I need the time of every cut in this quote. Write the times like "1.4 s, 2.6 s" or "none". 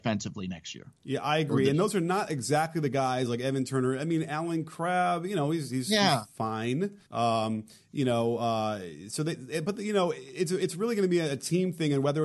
7.0 s